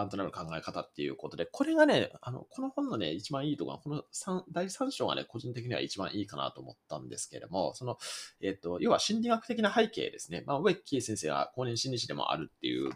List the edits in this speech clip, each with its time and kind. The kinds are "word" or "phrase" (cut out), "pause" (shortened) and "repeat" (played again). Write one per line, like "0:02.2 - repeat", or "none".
none